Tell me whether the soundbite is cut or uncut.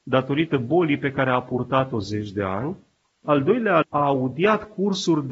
cut